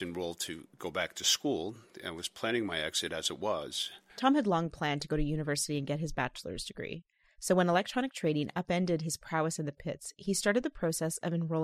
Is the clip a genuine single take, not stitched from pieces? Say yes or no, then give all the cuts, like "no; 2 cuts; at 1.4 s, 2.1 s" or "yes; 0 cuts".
yes; 0 cuts